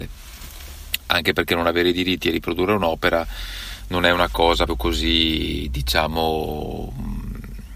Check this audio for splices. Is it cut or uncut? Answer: cut